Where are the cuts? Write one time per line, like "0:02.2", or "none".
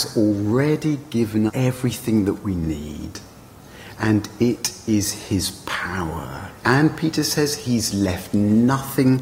0:01.5
0:06.6